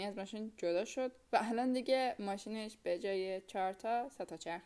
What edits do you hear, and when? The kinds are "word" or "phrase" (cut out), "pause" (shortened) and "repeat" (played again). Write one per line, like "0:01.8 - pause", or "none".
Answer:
none